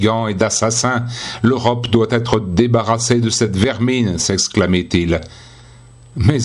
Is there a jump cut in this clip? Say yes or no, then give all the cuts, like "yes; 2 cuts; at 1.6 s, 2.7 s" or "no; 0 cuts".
no; 0 cuts